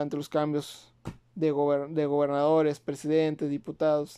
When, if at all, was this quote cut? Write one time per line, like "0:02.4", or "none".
none